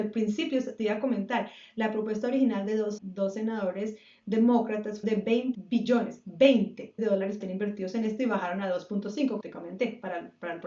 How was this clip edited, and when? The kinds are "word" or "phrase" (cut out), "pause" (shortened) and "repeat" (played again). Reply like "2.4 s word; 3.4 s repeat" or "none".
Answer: 3.0 s word; 5.0 s word; 5.5 s word; 7.0 s word; 7.4 s word; 9.4 s word